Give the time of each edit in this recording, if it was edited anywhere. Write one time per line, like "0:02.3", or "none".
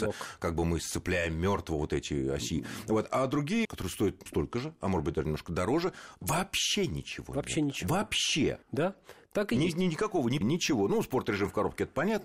0:03.6
0:04.3
0:08.6
0:10.4